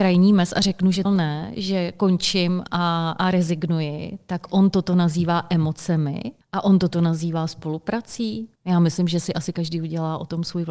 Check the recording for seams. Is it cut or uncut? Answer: cut